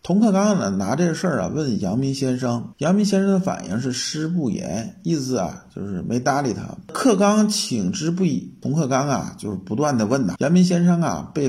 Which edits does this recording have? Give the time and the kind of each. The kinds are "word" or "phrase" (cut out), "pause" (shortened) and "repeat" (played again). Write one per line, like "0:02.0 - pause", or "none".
0:10.4 - word

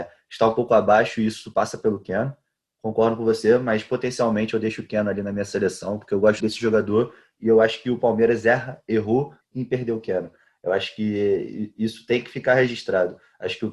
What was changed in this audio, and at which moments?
0:06.4 - word
0:09.4 - word

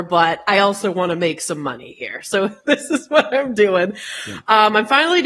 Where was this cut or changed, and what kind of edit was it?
none

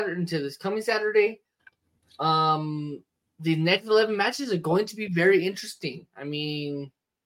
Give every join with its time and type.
none

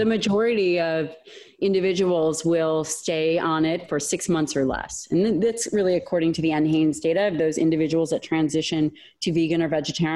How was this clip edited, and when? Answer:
none

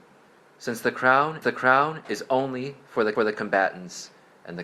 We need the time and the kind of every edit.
0:01.4 - repeat
0:03.1 - repeat

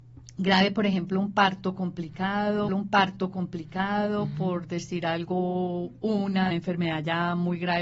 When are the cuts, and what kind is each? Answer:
0:02.7 - repeat
0:06.5 - phrase

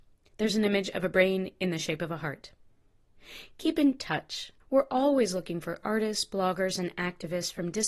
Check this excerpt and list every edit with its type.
0:04.6 - pause

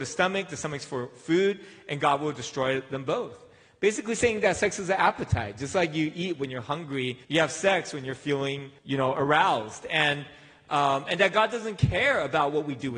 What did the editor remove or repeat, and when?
0:07.2 - pause
0:08.8 - pause

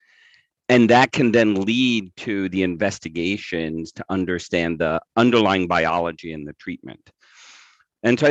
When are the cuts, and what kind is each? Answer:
0:05.0 - pause

